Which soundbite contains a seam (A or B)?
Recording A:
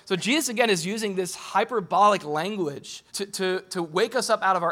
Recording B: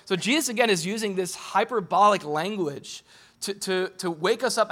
A